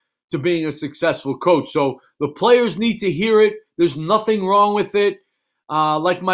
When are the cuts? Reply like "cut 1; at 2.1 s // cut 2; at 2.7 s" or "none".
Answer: none